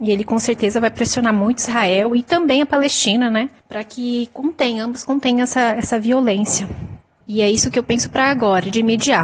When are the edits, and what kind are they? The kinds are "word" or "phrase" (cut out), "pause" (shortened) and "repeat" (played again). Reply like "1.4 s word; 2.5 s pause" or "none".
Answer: 3.6 s pause; 7.2 s pause